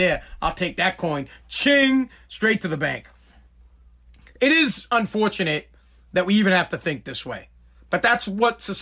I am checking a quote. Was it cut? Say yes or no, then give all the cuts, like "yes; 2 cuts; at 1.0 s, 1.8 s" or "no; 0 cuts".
no; 0 cuts